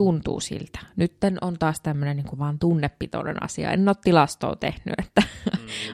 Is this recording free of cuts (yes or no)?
yes